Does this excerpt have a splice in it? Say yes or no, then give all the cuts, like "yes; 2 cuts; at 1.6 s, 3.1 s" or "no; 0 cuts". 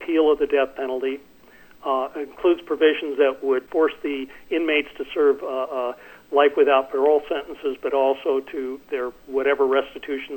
no; 0 cuts